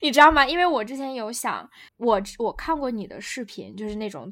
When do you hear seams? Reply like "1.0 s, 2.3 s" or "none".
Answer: 1.9 s